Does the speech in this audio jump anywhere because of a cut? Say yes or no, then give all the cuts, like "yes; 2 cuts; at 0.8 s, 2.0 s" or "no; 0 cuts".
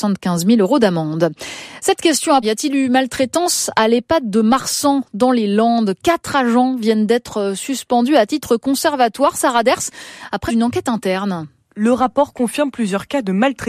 yes; 2 cuts; at 2.4 s, 10.5 s